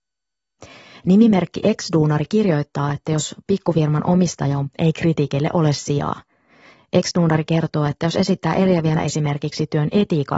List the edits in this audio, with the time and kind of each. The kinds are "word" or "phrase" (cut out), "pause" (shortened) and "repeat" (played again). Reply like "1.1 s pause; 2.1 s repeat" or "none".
4.7 s word; 9.0 s word